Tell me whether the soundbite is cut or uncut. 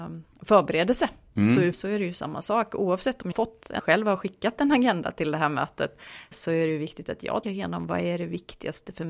cut